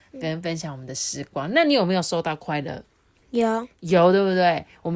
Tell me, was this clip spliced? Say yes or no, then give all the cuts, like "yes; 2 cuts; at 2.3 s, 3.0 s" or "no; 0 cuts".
no; 0 cuts